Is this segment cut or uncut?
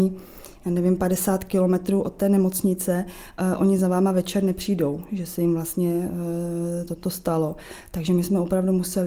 uncut